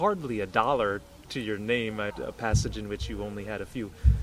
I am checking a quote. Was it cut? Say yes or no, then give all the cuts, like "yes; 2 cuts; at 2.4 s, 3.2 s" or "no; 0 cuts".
yes; 1 cut; at 2.1 s